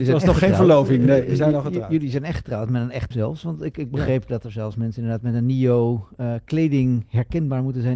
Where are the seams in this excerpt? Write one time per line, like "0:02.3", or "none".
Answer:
0:03.1